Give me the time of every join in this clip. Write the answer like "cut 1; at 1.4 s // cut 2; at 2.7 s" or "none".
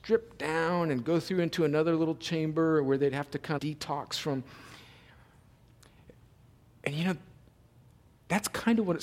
cut 1; at 3.6 s